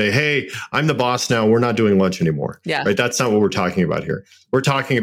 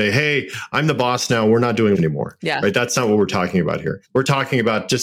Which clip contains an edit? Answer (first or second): second